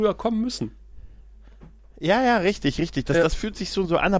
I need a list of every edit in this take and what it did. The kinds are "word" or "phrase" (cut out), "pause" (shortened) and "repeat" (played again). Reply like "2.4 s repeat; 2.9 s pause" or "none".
none